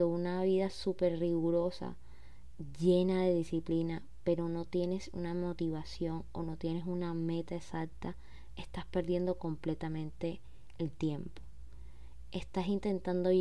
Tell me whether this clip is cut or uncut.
uncut